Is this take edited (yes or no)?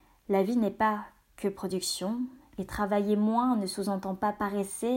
no